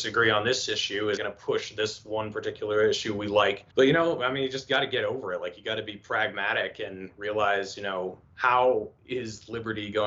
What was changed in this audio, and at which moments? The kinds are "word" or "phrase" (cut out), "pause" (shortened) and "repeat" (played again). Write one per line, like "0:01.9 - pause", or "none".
0:01.2 - word
0:03.7 - pause
0:08.2 - pause